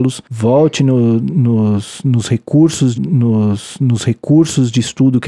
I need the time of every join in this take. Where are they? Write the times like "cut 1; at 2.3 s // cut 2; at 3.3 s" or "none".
cut 1; at 3.0 s